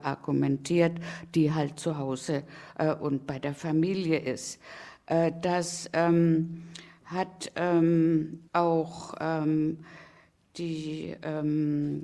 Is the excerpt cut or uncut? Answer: cut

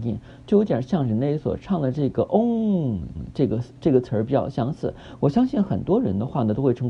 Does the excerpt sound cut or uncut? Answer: cut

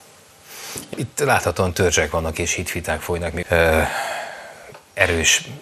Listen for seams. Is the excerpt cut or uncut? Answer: cut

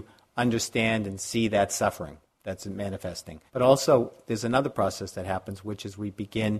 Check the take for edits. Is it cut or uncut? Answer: cut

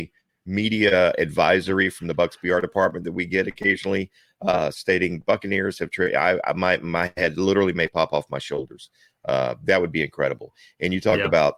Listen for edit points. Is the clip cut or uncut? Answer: uncut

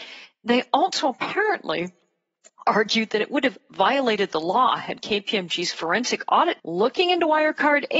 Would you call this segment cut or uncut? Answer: cut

